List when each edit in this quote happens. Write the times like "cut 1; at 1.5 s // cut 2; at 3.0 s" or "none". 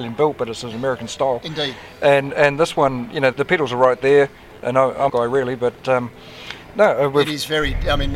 cut 1; at 3.3 s // cut 2; at 5.1 s